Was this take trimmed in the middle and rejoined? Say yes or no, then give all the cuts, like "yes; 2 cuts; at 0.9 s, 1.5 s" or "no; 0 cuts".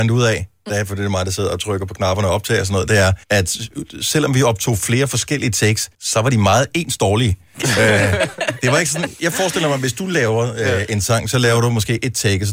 yes; 2 cuts; at 3.2 s, 5.9 s